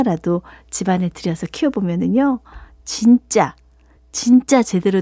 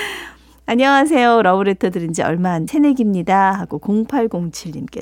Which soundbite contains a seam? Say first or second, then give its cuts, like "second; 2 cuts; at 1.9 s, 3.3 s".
second; 1 cut; at 2.7 s